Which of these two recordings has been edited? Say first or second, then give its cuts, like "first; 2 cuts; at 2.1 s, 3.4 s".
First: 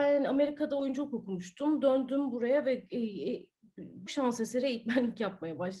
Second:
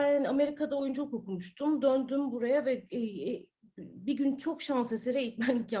first; 1 cut; at 4.1 s